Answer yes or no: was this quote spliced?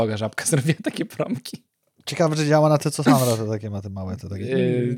no